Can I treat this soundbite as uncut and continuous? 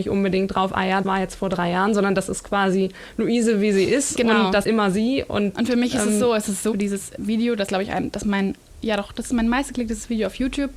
no; 5 cuts; at 1.0 s, 4.6 s, 6.7 s, 7.2 s, 7.7 s

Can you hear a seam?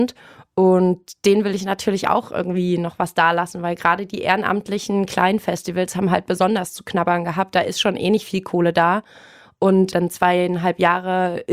no; 0 cuts

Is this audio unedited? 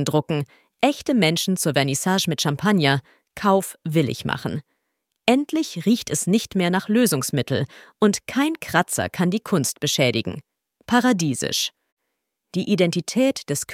yes; 0 cuts

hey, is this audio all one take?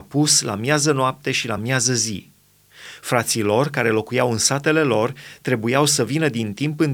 yes; 0 cuts

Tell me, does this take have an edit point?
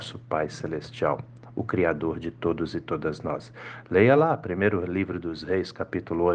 no; 0 cuts

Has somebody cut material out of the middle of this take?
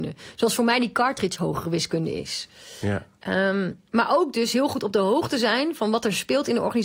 yes; 1 cut; at 3.9 s

